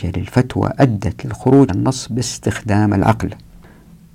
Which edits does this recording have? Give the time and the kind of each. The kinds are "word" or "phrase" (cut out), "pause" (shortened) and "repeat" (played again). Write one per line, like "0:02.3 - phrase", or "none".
0:01.7 - word